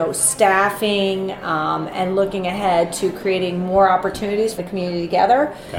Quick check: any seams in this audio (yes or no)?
yes